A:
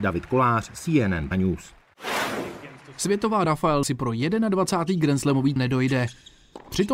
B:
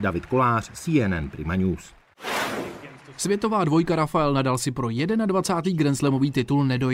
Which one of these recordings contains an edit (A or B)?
A